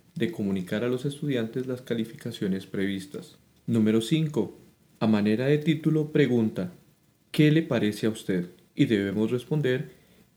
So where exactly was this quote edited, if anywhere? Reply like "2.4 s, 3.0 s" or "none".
none